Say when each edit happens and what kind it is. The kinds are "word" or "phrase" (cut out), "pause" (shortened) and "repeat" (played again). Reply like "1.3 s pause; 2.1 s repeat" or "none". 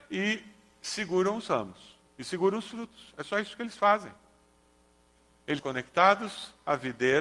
5.6 s word